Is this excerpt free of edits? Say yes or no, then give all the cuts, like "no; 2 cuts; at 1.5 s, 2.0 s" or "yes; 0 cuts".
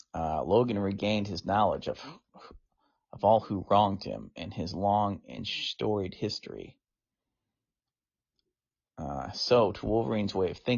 yes; 0 cuts